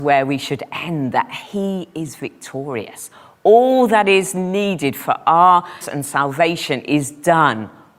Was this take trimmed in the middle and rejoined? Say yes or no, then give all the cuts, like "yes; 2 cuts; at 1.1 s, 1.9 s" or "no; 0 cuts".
yes; 1 cut; at 5.8 s